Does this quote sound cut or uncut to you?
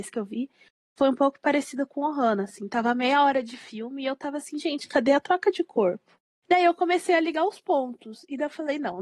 uncut